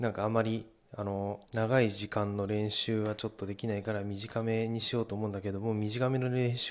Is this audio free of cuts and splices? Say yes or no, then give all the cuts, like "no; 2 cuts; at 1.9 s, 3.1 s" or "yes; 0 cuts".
no; 1 cut; at 1.5 s